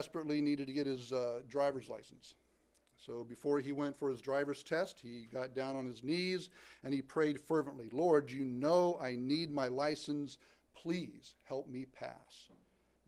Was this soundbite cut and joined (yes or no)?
no